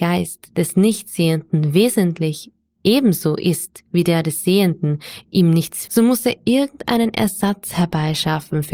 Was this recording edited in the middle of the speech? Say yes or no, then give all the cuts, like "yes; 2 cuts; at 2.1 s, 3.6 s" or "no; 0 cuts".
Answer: yes; 2 cuts; at 5.2 s, 5.9 s